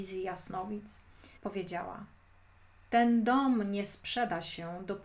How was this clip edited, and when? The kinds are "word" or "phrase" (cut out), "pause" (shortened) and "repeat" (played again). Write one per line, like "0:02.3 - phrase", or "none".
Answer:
0:01.4 - pause